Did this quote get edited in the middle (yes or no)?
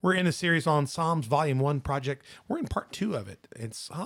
no